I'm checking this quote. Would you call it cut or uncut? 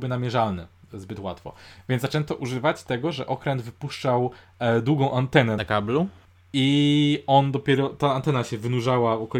uncut